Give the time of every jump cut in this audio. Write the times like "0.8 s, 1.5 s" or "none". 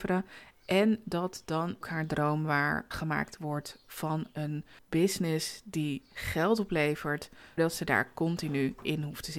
1.8 s, 2.9 s, 4.8 s, 7.6 s